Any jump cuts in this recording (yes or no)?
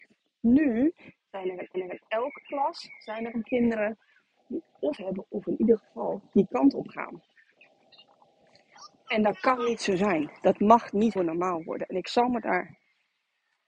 yes